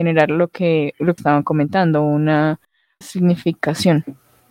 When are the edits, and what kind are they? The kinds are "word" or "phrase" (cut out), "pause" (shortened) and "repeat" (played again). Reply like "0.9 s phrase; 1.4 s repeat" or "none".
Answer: 1.2 s word; 3.0 s word